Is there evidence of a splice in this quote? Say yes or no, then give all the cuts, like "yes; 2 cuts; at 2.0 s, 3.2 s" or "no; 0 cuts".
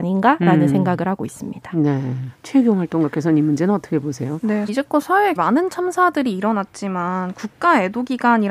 yes; 3 cuts; at 2.3 s, 4.7 s, 5.4 s